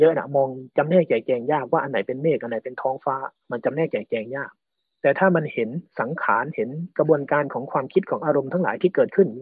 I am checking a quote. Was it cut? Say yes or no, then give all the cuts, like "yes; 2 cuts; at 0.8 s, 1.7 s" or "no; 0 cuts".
no; 0 cuts